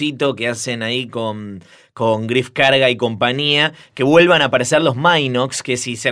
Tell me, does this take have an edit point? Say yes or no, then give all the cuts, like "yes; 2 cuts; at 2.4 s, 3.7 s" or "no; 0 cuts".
no; 0 cuts